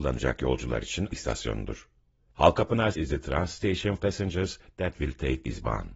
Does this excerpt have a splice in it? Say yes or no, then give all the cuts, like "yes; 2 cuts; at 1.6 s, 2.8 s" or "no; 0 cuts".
yes; 3 cuts; at 1.1 s, 2.9 s, 4.0 s